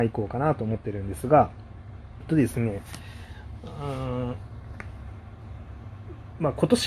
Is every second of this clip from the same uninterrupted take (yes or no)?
no